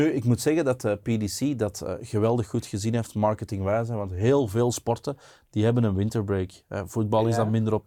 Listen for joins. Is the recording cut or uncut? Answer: uncut